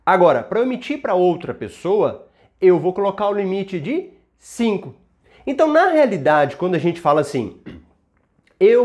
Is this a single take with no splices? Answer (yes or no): yes